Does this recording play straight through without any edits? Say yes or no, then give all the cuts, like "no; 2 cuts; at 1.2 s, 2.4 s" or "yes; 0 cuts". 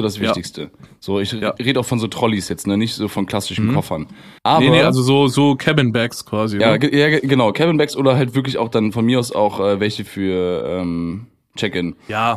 no; 2 cuts; at 4.4 s, 10.1 s